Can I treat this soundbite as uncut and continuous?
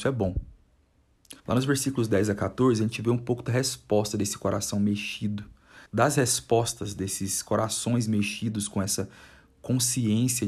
no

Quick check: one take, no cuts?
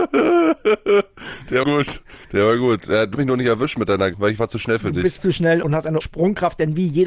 no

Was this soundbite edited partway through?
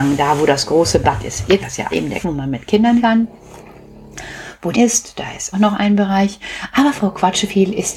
yes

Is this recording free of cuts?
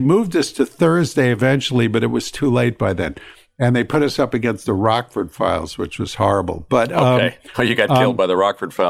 yes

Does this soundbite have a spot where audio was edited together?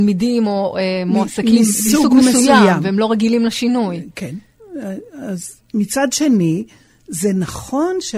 no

